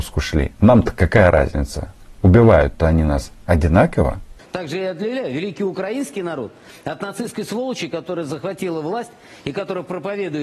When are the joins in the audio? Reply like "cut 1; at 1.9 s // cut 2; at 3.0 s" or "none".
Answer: none